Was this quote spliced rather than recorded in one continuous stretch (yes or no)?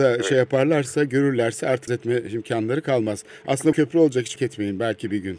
yes